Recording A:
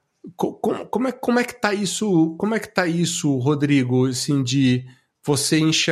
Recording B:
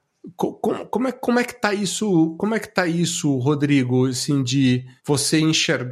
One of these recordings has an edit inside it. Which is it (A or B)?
B